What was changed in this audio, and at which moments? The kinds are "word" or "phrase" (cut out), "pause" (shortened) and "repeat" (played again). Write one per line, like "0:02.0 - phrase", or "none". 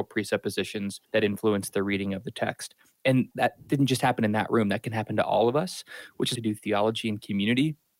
0:01.0 - pause
0:03.3 - word
0:06.4 - phrase